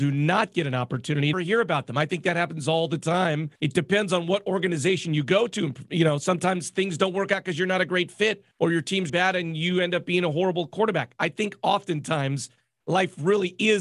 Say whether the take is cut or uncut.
cut